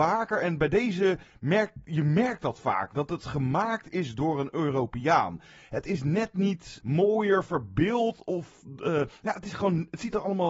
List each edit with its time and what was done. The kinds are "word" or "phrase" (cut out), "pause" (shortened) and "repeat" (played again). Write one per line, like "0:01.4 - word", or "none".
0:06.8 - word